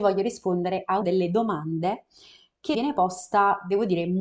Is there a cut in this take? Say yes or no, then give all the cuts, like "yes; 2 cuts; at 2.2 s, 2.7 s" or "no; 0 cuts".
yes; 2 cuts; at 1.0 s, 2.7 s